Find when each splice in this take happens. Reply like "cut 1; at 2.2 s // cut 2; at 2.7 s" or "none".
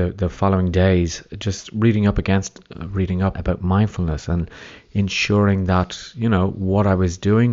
cut 1; at 3.3 s